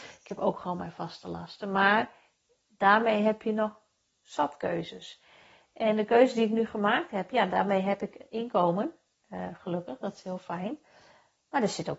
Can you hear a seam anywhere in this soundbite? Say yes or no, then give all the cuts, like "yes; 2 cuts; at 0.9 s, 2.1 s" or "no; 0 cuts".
no; 0 cuts